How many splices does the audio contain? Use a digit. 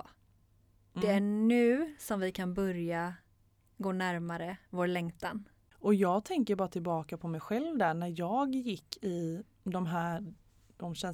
0